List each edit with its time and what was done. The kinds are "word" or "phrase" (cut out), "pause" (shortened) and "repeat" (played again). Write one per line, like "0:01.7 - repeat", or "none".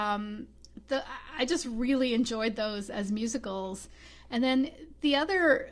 none